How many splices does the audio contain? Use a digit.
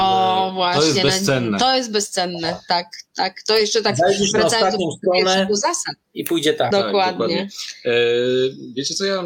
2